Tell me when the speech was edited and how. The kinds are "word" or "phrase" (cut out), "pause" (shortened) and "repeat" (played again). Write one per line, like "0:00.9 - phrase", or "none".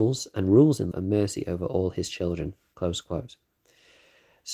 0:00.9 - word